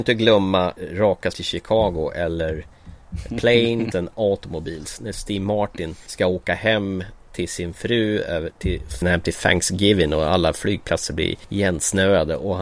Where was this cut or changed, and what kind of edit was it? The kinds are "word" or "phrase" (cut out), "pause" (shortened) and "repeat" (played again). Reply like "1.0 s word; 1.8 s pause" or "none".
1.3 s word; 3.9 s word; 9.0 s word